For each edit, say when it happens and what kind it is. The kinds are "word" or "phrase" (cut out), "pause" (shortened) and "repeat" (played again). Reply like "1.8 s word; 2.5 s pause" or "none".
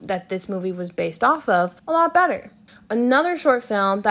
1.8 s pause